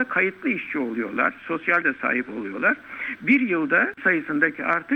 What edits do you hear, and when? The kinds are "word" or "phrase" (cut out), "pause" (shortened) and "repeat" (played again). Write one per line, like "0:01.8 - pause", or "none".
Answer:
0:01.8 - word
0:04.0 - word